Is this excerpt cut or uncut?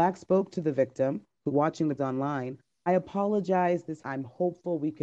cut